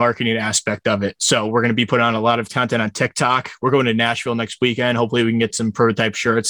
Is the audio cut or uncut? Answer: uncut